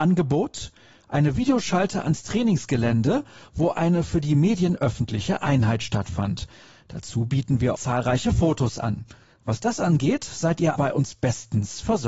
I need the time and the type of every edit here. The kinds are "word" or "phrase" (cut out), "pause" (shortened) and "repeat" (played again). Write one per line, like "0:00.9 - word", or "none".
0:07.7 - word
0:10.7 - word

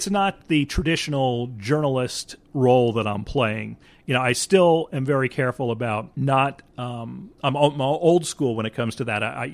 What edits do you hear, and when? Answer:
0:06.1 - pause
0:07.4 - pause

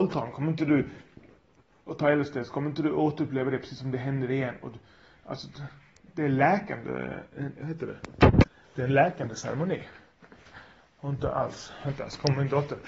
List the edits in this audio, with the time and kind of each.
0:07.5 - word

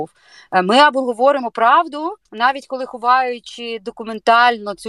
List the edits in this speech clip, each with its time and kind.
0:02.3 - pause

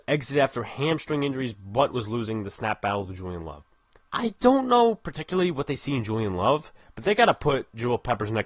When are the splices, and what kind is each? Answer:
0:04.0 - pause

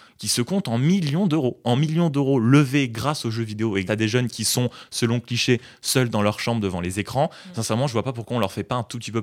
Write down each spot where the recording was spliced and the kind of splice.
0:03.9 - word

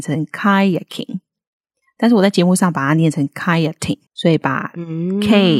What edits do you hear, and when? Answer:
0:04.1 - pause

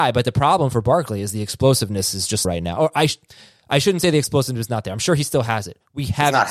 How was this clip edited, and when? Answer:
0:02.4 - phrase

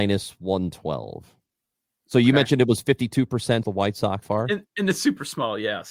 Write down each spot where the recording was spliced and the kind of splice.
0:03.6 - phrase
0:04.2 - word

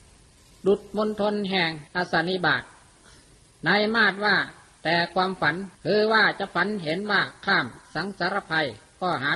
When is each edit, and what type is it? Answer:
0:01.9 - pause
0:05.7 - pause

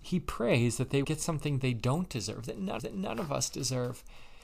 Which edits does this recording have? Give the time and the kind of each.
0:01.0 - word
0:02.8 - repeat

